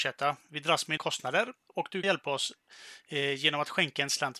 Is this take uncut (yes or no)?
no